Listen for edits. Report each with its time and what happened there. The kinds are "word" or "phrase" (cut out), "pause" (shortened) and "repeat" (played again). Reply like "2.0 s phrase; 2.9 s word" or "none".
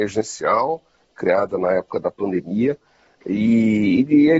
none